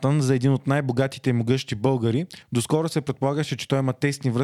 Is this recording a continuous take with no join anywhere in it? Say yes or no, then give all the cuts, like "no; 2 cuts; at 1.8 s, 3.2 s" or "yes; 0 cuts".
yes; 0 cuts